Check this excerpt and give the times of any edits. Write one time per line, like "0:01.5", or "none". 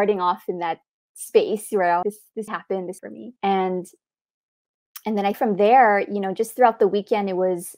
0:02.0
0:02.5
0:03.0
0:03.4
0:05.3

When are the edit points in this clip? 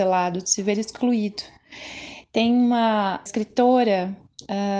0:03.3

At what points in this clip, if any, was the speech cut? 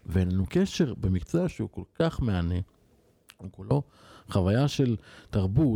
none

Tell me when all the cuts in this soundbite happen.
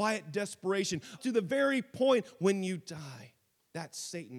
0:01.2

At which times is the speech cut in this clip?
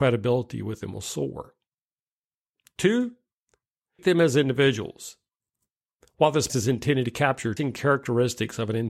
0:04.0
0:06.5
0:07.6

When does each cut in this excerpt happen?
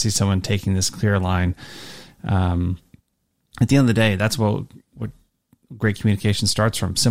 none

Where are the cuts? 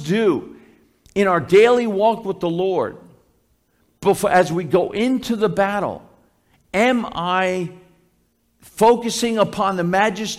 none

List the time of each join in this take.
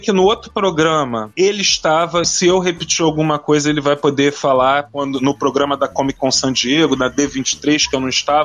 0:02.2

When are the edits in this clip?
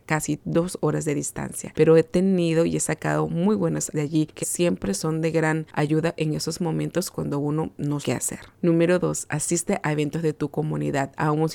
0:03.9
0:04.4
0:08.0

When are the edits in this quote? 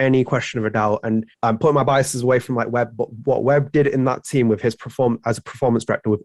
0:01.3

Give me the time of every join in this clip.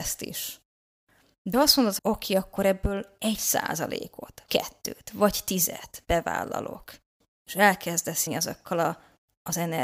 0:01.5
0:02.0
0:04.5
0:08.3

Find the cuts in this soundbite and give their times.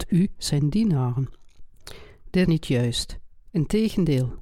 0:02.5

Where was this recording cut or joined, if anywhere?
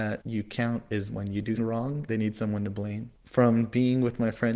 0:01.6
0:02.1
0:03.2

